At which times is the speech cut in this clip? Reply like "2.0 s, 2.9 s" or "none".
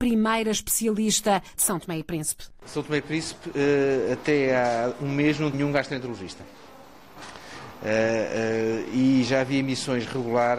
1.6 s, 5.5 s

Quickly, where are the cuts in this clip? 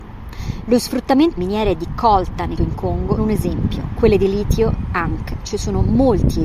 1.4 s, 2.6 s, 3.2 s

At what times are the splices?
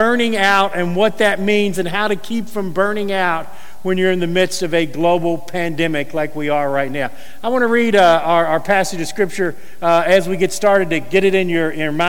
none

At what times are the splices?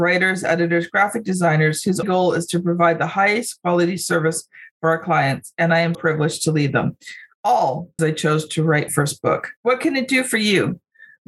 2.0 s, 5.9 s, 8.0 s, 8.9 s, 9.6 s

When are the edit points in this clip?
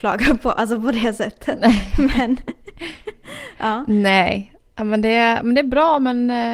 none

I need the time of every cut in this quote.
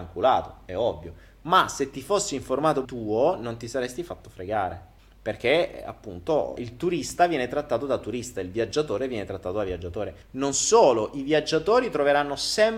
2.8 s, 5.0 s, 6.6 s, 10.2 s

